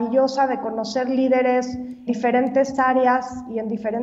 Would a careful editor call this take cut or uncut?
cut